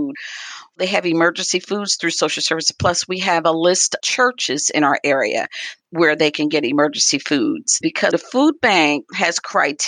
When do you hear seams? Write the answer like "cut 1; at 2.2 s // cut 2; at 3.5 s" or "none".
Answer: cut 1; at 4.0 s // cut 2; at 8.1 s

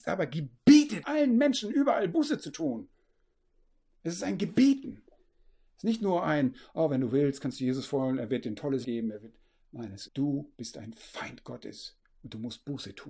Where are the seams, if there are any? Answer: cut 1; at 1.0 s // cut 2; at 8.8 s // cut 3; at 10.1 s

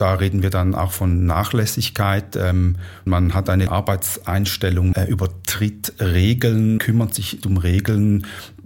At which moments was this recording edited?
cut 1; at 3.1 s // cut 2; at 3.7 s // cut 3; at 4.9 s // cut 4; at 6.8 s // cut 5; at 7.4 s

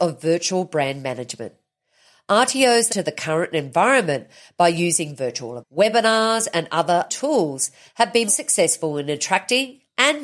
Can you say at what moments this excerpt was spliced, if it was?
cut 1; at 2.9 s // cut 2; at 5.6 s // cut 3; at 7.1 s // cut 4; at 8.3 s

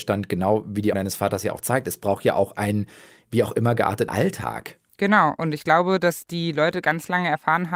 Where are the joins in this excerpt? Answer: cut 1; at 0.9 s // cut 2; at 4.1 s

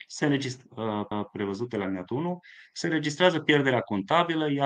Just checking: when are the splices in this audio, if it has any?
cut 1; at 1.1 s

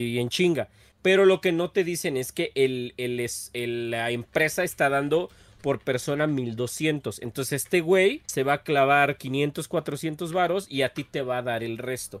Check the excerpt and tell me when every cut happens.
cut 1; at 8.2 s

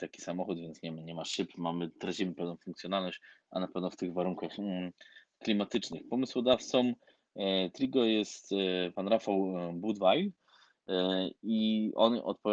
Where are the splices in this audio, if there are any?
none

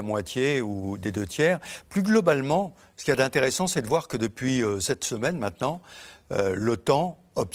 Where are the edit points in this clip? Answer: none

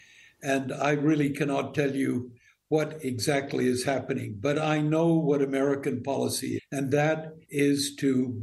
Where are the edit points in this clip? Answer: cut 1; at 6.6 s // cut 2; at 7.4 s

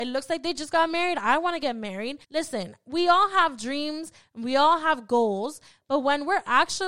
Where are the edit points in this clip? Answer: cut 1; at 2.2 s

